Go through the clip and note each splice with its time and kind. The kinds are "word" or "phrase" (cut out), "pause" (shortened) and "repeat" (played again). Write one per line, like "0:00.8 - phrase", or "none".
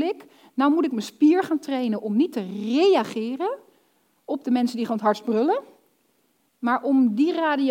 none